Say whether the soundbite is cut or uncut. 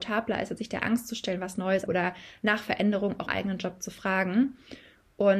cut